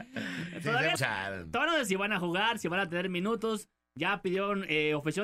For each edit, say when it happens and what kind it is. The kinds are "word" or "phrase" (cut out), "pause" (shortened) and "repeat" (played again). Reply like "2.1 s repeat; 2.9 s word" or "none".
1.0 s word; 1.9 s word

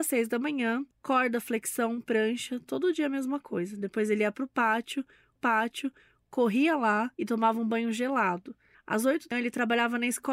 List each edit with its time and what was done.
0.9 s pause; 5.4 s repeat; 7.1 s pause; 8.7 s pause; 9.3 s word

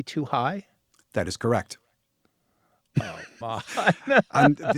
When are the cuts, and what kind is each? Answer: 3.4 s word

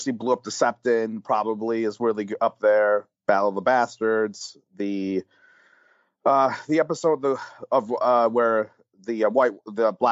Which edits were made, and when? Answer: none

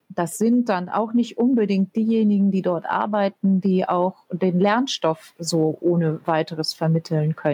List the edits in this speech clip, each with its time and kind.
none

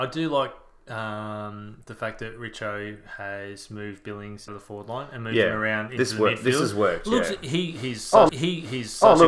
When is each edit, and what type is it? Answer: 4.5 s word; 8.3 s repeat

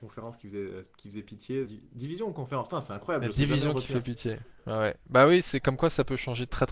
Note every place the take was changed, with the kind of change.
1.6 s phrase

